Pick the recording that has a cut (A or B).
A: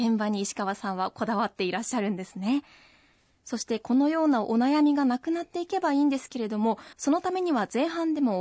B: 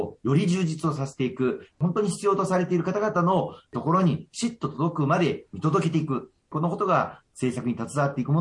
A